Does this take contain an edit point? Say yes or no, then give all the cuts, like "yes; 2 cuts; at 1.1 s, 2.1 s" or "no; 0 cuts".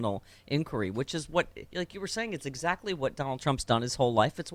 yes; 1 cut; at 1.7 s